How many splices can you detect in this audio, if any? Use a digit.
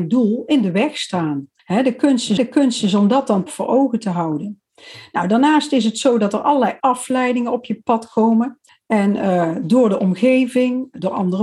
5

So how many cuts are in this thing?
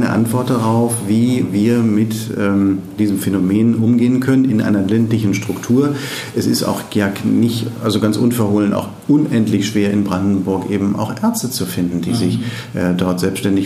0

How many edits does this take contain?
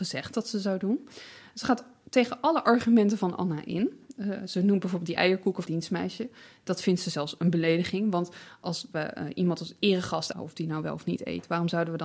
2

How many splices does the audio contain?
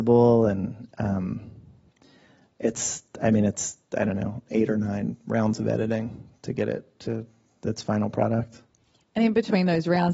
0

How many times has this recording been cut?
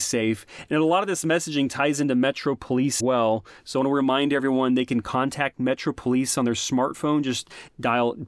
1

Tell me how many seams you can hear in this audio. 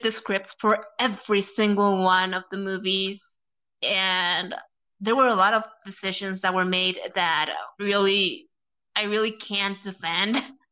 1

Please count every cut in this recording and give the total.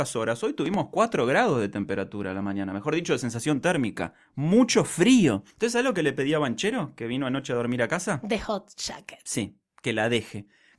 1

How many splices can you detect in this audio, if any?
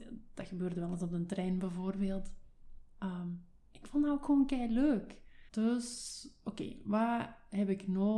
1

